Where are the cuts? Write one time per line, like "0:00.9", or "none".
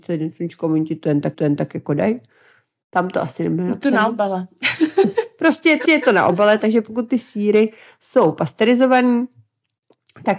0:01.3
0:05.8